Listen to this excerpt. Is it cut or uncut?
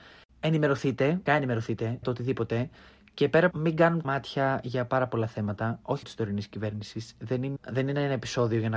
cut